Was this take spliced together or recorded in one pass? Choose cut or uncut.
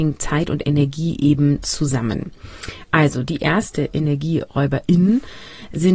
uncut